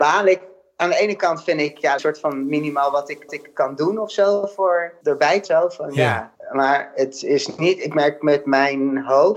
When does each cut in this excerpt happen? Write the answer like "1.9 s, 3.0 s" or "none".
2.0 s, 3.3 s, 5.0 s, 5.5 s